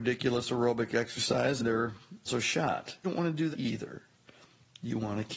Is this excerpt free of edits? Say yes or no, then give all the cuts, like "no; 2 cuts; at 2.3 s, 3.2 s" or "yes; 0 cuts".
no; 4 cuts; at 1.6 s, 2.3 s, 3.0 s, 3.5 s